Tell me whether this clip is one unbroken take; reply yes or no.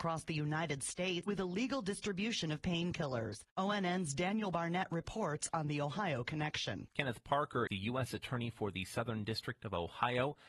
no